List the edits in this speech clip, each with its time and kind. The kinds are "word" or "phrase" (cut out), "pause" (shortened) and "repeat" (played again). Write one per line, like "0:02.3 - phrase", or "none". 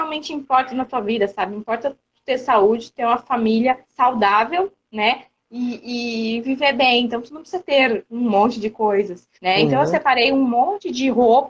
0:03.8 - pause
0:09.3 - pause